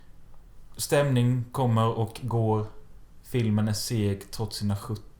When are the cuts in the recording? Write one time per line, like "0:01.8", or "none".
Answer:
none